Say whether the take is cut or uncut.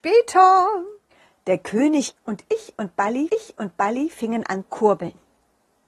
cut